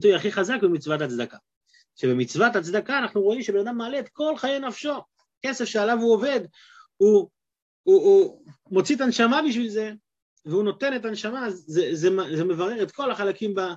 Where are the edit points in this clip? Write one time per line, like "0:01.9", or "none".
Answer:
none